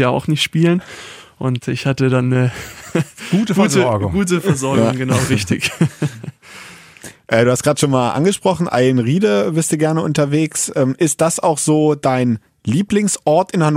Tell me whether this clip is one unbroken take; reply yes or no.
yes